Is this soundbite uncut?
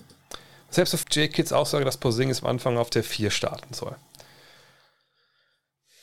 no; 1 cut; at 1.0 s

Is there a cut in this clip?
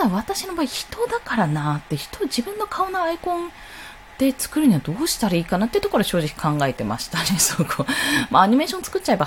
no; 0 cuts

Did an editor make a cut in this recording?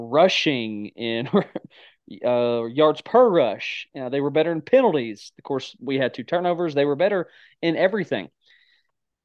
no; 0 cuts

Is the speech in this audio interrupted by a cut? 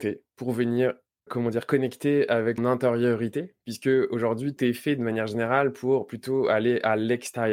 yes; 3 cuts; at 1.3 s, 2.6 s, 4.6 s

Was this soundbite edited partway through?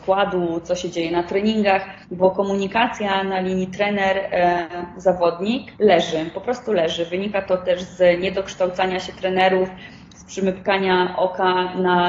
yes; 2 cuts; at 2.0 s, 5.7 s

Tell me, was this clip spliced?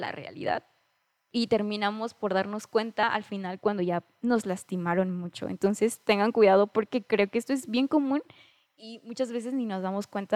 no; 0 cuts

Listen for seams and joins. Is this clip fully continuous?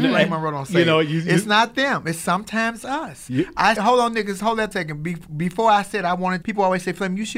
no; 4 cuts; at 2.8 s, 3.8 s, 4.7 s, 6.4 s

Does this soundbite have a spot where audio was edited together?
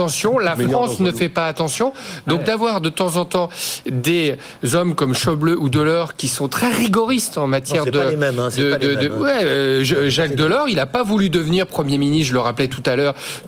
no; 0 cuts

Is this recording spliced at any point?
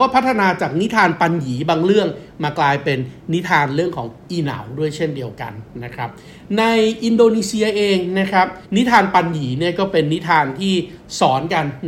yes; 1 cut; at 8.6 s

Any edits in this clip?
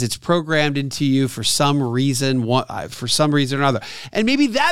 no; 0 cuts

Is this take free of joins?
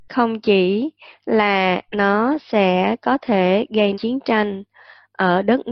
no; 2 cuts; at 1.9 s, 3.9 s

